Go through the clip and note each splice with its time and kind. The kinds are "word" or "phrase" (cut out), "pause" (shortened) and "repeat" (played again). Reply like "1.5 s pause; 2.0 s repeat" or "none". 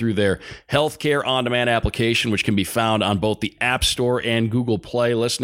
none